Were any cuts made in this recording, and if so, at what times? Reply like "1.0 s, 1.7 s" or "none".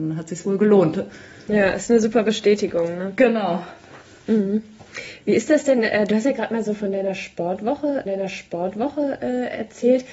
8.1 s